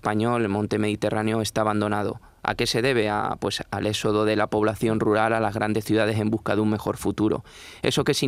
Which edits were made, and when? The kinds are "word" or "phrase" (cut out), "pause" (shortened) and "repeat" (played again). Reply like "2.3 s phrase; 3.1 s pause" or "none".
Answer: none